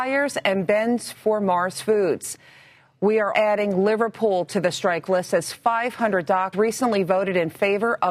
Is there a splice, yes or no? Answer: yes